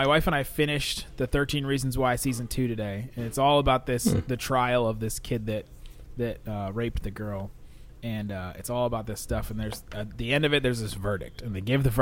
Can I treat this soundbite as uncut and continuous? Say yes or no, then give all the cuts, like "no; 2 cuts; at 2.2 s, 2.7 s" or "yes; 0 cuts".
yes; 0 cuts